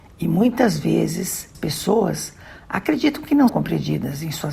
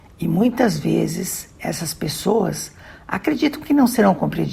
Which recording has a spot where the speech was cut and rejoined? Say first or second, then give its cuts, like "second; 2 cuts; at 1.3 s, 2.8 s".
first; 2 cuts; at 1.5 s, 3.5 s